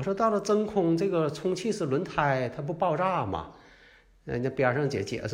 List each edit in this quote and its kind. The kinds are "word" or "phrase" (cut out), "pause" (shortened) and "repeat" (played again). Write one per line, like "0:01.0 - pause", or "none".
none